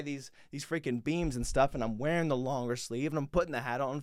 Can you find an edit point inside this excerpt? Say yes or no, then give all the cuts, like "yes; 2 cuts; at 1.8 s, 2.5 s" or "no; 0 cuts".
yes; 1 cut; at 1.0 s